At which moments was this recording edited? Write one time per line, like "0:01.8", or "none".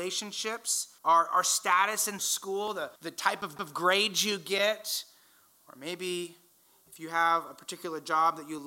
0:01.0
0:02.2
0:03.0
0:03.6